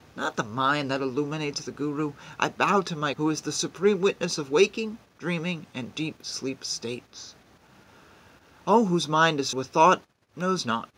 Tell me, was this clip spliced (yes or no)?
yes